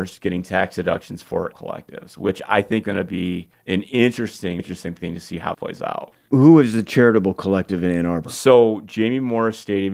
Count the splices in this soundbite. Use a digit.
5